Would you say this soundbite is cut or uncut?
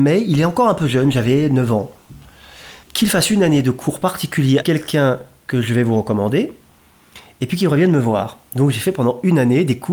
cut